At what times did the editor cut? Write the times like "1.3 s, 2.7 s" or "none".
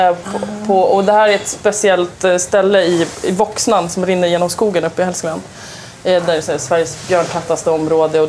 none